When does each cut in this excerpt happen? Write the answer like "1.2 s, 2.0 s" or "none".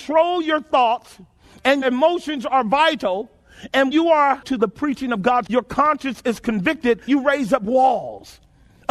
1.8 s, 3.9 s, 4.4 s, 5.5 s, 7.1 s